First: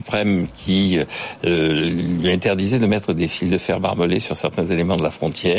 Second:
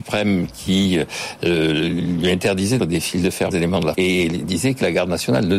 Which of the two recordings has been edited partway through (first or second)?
second